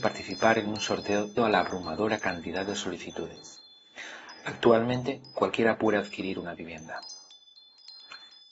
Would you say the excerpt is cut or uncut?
cut